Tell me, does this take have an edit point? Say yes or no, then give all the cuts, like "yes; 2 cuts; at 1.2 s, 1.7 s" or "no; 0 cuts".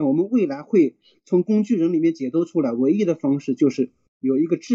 no; 0 cuts